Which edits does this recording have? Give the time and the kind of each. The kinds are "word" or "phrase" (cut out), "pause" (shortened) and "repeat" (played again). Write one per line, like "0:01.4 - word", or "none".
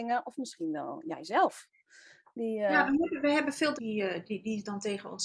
0:03.7 - word